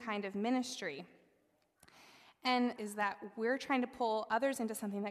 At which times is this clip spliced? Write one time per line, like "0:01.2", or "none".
0:02.8